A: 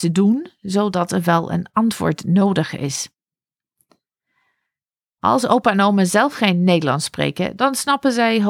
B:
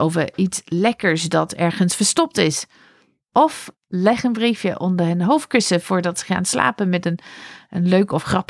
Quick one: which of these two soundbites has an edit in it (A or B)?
B